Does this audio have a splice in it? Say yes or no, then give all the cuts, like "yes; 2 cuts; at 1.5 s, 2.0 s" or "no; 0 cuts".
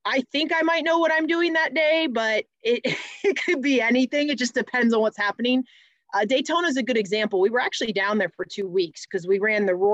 no; 0 cuts